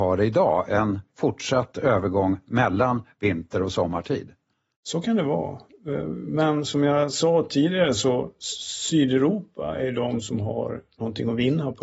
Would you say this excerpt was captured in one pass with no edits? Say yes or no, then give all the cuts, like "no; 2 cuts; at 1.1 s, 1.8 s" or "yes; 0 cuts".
yes; 0 cuts